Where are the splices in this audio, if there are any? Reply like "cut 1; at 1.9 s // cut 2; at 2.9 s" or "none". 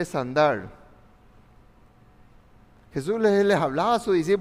none

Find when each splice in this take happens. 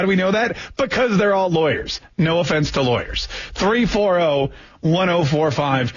none

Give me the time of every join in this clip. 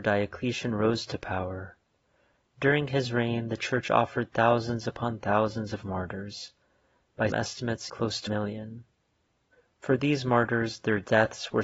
cut 1; at 7.3 s // cut 2; at 7.9 s // cut 3; at 8.3 s

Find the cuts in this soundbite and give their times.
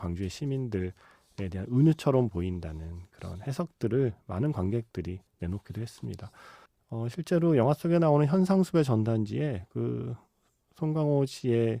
cut 1; at 5.3 s // cut 2; at 6.7 s

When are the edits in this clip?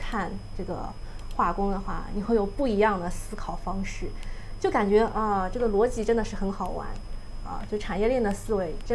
none

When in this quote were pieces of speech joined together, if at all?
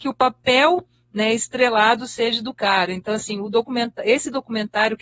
none

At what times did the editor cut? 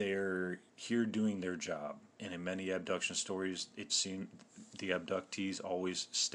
cut 1; at 2.1 s // cut 2; at 3.9 s

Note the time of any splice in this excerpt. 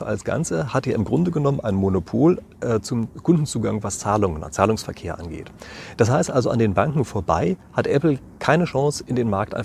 none

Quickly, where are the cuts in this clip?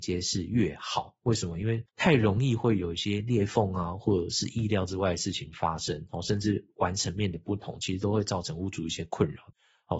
cut 1; at 1.9 s

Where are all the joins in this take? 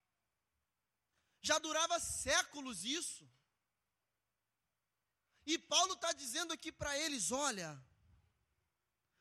none

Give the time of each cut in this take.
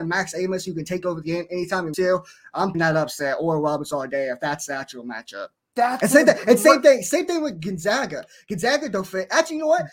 cut 1; at 1.9 s // cut 2; at 2.7 s

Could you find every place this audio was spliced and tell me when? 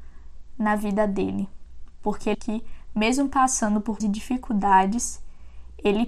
cut 1; at 2.3 s // cut 2; at 4.0 s

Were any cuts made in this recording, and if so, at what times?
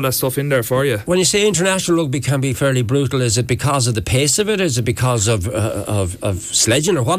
none

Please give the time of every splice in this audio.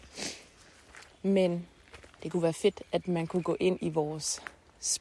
cut 1; at 2.1 s

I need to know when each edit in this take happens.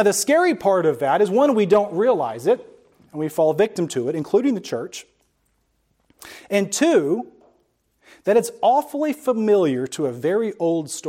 none

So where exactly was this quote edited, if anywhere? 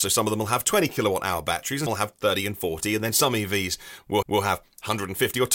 cut 1; at 1.9 s // cut 2; at 4.2 s

